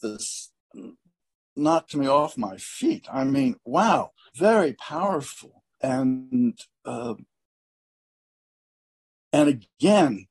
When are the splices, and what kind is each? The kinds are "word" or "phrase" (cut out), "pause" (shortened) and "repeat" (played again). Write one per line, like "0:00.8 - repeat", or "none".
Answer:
0:04.3 - word
0:05.7 - pause